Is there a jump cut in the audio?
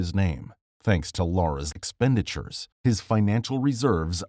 yes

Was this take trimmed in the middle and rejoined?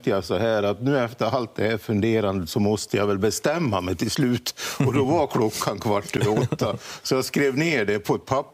no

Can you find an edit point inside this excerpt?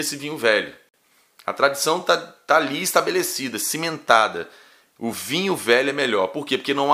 no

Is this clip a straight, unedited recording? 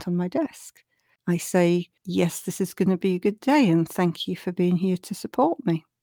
yes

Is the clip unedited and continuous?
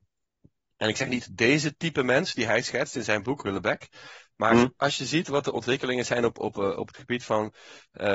yes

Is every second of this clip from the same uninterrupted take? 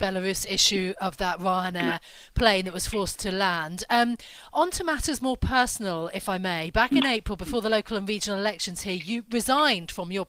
yes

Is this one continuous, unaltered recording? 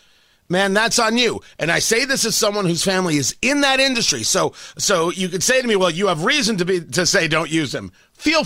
yes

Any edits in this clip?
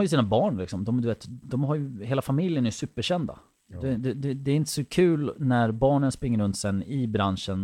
no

